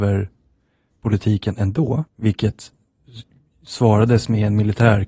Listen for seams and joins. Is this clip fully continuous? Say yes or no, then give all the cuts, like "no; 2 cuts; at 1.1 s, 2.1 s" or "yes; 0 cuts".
no; 2 cuts; at 0.9 s, 2.1 s